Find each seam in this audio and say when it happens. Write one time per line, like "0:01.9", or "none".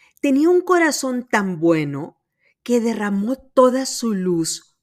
none